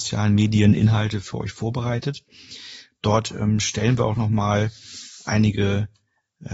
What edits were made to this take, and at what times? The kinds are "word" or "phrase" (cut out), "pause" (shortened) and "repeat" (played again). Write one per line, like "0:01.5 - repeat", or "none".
none